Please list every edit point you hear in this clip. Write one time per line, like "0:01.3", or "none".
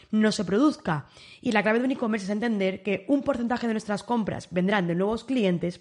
none